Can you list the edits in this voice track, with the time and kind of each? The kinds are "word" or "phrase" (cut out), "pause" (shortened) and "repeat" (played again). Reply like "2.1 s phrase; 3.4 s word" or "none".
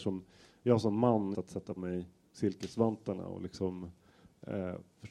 1.3 s phrase; 1.8 s word